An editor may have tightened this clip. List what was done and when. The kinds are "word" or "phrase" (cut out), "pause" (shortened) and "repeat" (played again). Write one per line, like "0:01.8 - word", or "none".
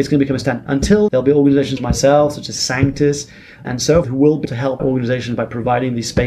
0:01.1 - word
0:01.8 - word
0:03.6 - word
0:04.0 - word
0:04.4 - word
0:04.8 - word